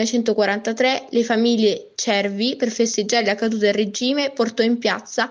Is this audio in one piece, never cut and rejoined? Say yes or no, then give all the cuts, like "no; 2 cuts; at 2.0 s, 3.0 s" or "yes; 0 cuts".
yes; 0 cuts